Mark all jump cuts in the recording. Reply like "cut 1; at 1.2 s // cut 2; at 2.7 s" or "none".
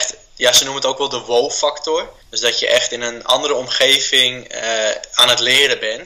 cut 1; at 2.2 s